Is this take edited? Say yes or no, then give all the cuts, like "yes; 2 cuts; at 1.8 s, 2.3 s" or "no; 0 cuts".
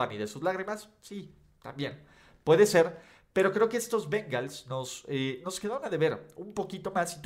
no; 0 cuts